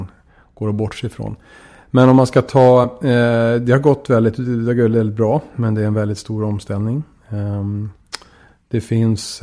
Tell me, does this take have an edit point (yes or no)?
no